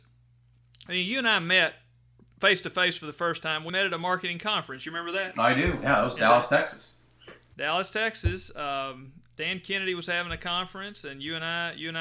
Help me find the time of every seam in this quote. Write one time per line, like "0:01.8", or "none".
0:03.7

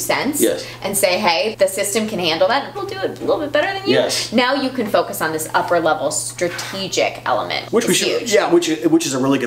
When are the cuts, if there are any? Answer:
0:01.5
0:02.7
0:07.7

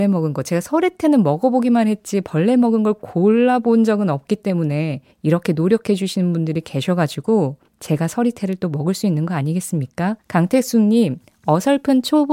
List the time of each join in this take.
0:05.1
0:07.7
0:10.2

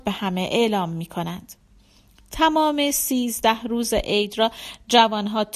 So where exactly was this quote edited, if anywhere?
none

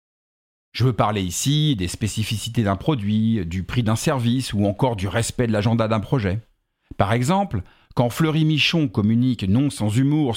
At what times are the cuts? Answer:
none

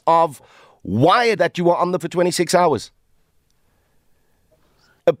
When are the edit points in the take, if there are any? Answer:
0:01.4
0:02.0

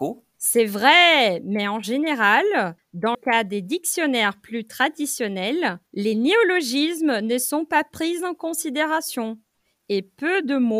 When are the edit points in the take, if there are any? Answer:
0:03.1
0:05.9

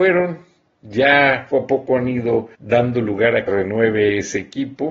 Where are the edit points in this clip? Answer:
0:01.5
0:02.5
0:03.5

